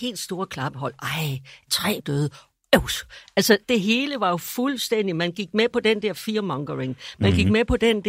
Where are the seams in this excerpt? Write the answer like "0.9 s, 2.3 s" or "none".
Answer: 1.7 s, 2.0 s, 3.6 s